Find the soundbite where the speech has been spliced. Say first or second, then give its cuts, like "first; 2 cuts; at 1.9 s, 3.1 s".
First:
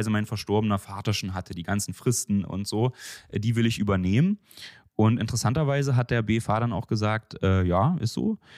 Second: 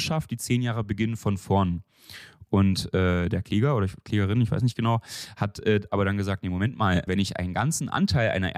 second; 1 cut; at 7.1 s